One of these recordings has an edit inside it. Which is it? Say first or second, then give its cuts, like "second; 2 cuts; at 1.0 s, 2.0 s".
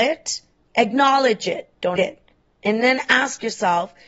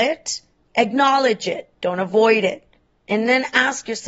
first; 1 cut; at 2.0 s